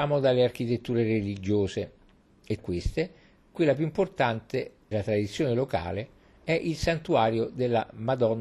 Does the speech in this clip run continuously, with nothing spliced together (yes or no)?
no